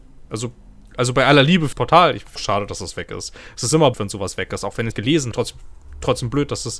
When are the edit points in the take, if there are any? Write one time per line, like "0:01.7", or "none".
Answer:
0:01.7
0:02.4
0:03.9
0:04.9
0:05.3